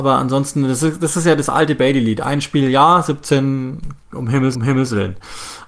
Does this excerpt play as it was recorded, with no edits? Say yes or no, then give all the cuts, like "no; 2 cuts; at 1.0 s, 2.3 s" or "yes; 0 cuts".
no; 1 cut; at 4.5 s